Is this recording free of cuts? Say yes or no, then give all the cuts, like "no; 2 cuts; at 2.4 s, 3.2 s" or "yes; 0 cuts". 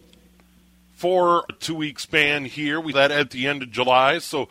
no; 2 cuts; at 1.5 s, 2.9 s